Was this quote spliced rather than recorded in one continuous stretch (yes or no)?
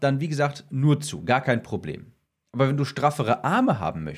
yes